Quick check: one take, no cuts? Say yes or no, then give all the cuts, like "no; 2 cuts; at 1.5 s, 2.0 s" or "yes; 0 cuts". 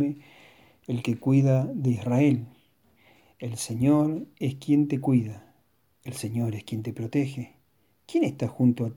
yes; 0 cuts